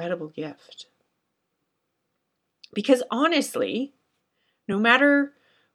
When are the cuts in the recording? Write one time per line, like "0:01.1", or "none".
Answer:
none

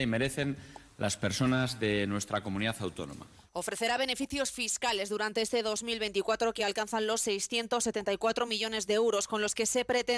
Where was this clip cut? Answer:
none

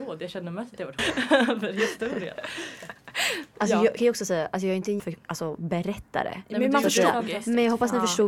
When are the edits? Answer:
0:01.0
0:04.0
0:05.0

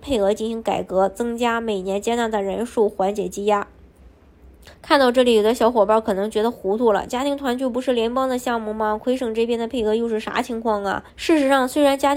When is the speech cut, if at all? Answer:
0:04.7
0:11.1

